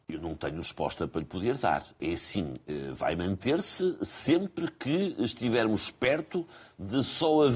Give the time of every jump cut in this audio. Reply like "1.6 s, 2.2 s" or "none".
none